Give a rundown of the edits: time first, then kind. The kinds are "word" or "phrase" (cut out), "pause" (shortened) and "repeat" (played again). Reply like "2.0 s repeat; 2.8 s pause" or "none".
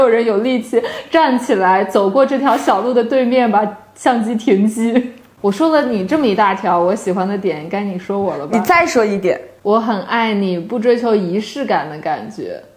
none